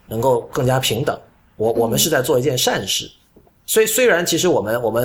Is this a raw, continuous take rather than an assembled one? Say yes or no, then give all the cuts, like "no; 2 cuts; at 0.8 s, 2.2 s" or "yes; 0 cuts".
yes; 0 cuts